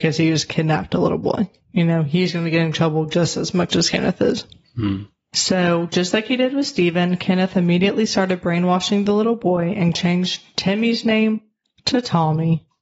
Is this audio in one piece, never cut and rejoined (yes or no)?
yes